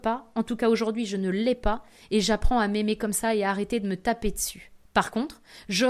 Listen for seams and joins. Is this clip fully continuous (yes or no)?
yes